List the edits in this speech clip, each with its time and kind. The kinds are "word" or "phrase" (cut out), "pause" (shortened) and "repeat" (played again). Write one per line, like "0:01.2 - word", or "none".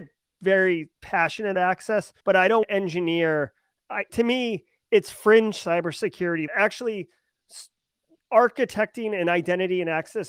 0:01.5 - word
0:02.2 - pause
0:02.6 - word
0:04.1 - word
0:06.5 - word

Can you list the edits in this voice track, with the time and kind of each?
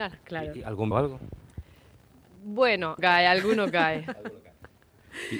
0:00.9 - phrase
0:03.0 - word

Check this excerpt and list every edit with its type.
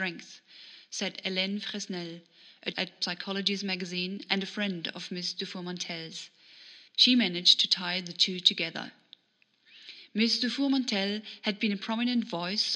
0:02.7 - word
0:06.9 - pause

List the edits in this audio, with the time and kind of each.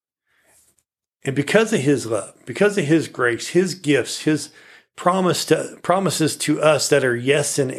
none

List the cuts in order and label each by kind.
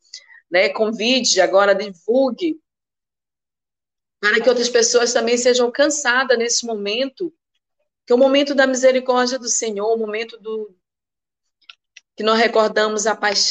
none

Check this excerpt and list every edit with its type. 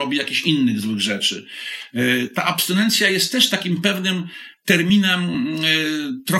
none

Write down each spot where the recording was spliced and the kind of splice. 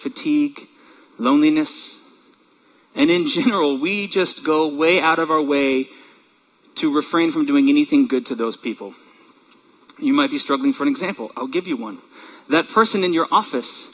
none

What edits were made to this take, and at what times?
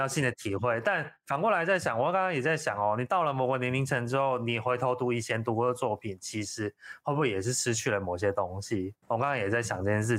0:09.0 - pause

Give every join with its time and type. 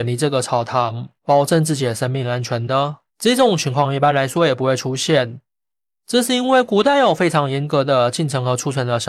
0:01.2 - pause
0:03.1 - pause

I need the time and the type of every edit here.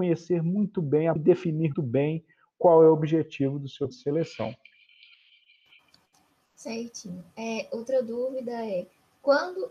0:01.2 - word
0:01.7 - word
0:03.9 - word

